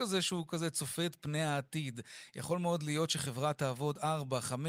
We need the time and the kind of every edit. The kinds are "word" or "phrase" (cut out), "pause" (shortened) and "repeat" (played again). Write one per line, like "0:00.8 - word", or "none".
none